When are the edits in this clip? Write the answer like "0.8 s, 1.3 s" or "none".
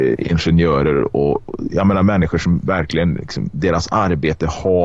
none